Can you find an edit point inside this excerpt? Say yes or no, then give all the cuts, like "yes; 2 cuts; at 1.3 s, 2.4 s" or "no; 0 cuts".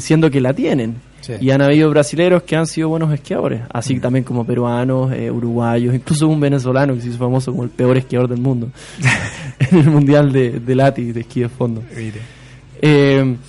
no; 0 cuts